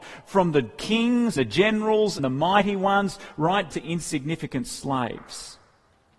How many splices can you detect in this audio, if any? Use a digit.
3